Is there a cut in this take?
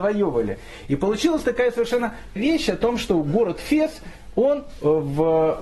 yes; 1 cut; at 2.4 s

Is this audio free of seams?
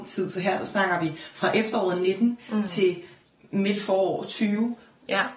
yes; 0 cuts

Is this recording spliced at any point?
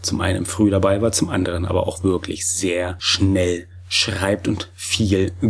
no; 0 cuts

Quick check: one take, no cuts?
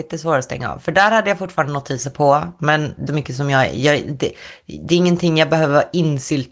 no; 1 cut; at 3.1 s

